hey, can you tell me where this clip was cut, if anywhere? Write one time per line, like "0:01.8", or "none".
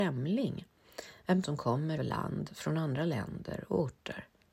0:01.4
0:02.0